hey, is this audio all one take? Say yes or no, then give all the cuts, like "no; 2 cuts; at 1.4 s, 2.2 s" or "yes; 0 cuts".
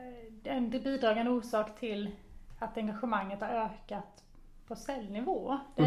yes; 0 cuts